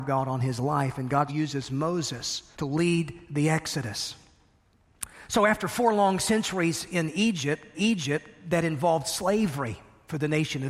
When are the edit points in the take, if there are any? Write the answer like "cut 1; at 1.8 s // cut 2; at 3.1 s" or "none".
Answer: cut 1; at 1.3 s // cut 2; at 2.5 s // cut 3; at 7.7 s